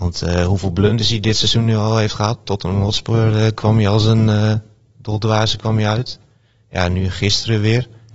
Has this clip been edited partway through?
no; 0 cuts

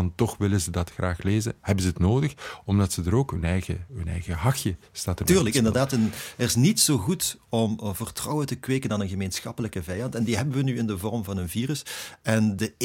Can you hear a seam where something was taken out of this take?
no; 0 cuts

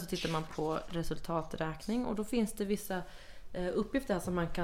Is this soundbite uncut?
yes; 0 cuts

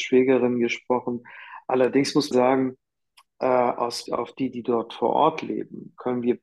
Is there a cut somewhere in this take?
yes; 2 cuts; at 2.3 s, 4.1 s

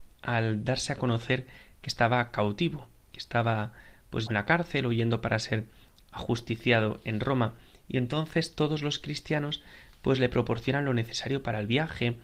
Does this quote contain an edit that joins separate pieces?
yes; 1 cut; at 4.3 s

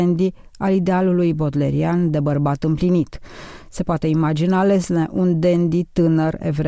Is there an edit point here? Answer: no; 0 cuts

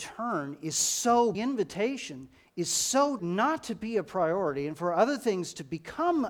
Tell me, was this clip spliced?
yes; 2 cuts; at 1.3 s, 3.2 s

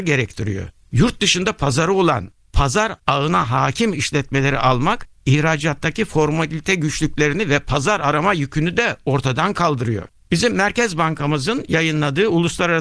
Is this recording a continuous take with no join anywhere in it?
no; 1 cut; at 3.0 s

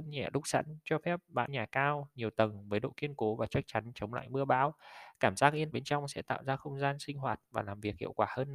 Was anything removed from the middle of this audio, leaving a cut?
yes; 2 cuts; at 1.5 s, 5.7 s

